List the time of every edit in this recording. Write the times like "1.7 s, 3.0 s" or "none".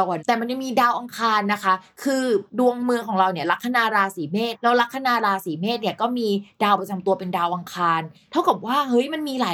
2.5 s